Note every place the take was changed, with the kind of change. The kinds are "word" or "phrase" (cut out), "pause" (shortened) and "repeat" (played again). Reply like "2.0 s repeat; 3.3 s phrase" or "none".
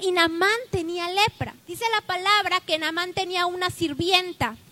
1.6 s pause